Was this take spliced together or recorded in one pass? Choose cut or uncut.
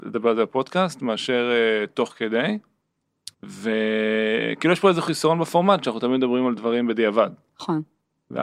cut